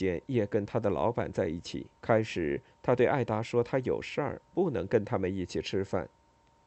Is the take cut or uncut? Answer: cut